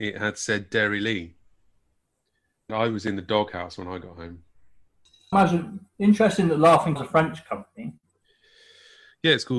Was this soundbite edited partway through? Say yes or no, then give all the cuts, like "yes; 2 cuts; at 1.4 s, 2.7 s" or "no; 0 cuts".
yes; 3 cuts; at 2.7 s, 5.3 s, 7.0 s